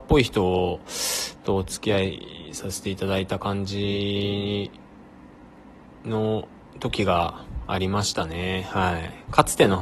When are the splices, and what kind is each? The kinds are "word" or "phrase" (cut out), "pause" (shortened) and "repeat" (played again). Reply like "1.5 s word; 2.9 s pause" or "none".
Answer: none